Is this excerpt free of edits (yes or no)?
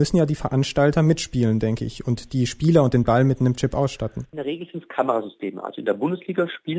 yes